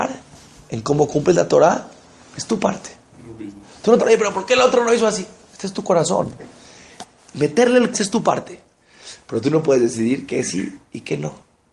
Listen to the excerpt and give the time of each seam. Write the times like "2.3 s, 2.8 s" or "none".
4.0 s, 7.9 s